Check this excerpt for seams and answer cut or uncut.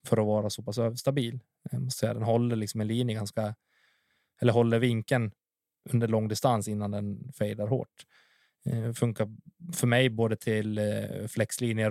uncut